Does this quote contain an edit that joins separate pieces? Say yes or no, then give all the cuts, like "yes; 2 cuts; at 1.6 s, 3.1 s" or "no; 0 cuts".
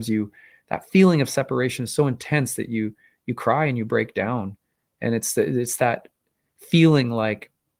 no; 0 cuts